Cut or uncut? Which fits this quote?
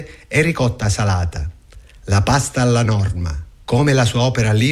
uncut